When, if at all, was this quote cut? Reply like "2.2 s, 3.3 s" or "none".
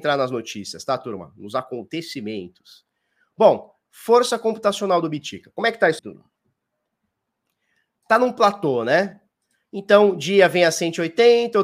6.0 s